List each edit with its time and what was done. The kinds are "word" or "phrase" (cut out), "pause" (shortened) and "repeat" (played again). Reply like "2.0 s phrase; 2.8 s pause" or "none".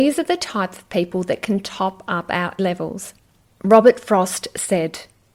2.6 s word